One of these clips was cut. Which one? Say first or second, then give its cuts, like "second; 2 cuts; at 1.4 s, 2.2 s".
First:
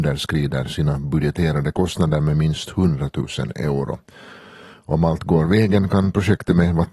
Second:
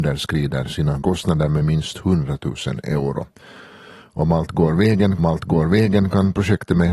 second; 2 cuts; at 1.0 s, 5.2 s